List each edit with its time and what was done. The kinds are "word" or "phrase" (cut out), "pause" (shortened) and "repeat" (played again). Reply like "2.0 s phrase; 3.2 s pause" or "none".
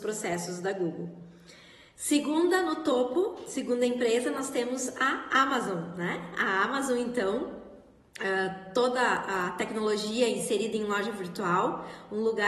none